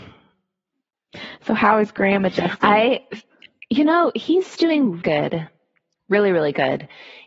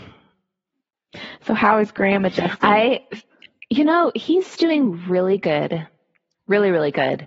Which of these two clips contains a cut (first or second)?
first